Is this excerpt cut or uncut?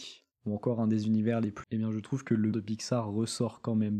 cut